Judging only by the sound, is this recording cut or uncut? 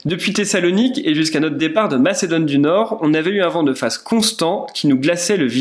uncut